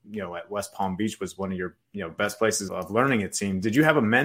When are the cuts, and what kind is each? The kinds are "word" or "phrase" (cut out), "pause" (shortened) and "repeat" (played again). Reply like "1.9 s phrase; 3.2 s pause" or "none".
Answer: 1.8 s pause; 2.7 s word